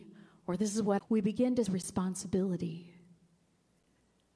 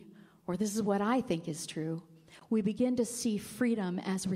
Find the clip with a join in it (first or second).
first